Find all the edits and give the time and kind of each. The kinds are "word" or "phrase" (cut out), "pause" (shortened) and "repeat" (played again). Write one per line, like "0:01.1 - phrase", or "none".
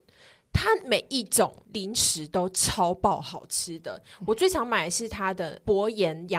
none